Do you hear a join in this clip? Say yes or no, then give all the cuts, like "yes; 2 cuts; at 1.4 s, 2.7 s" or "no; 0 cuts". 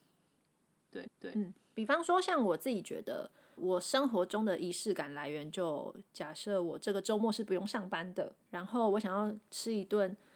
yes; 4 cuts; at 1.0 s, 3.6 s, 6.1 s, 8.4 s